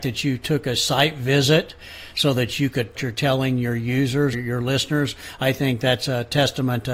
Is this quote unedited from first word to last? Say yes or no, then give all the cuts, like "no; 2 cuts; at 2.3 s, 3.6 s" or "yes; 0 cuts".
no; 2 cuts; at 2.9 s, 4.3 s